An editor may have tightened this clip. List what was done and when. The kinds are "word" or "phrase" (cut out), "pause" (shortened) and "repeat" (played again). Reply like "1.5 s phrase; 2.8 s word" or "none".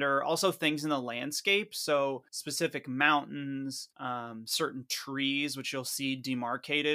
2.3 s pause; 3.9 s pause